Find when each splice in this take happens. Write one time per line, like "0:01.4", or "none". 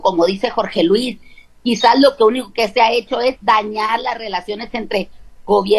none